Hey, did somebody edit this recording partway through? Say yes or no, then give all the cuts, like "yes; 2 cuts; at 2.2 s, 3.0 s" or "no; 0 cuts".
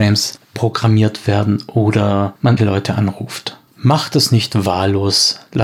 yes; 1 cut; at 2.6 s